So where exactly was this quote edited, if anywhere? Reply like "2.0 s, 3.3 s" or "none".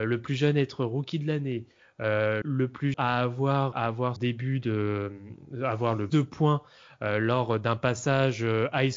2.4 s, 2.9 s, 3.7 s, 4.2 s, 6.1 s